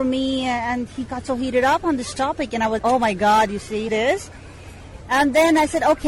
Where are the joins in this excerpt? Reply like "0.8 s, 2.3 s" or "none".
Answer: 1.1 s, 2.8 s, 3.9 s

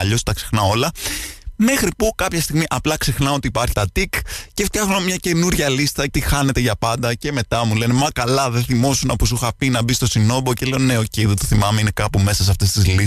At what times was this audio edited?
3.7 s, 6.1 s

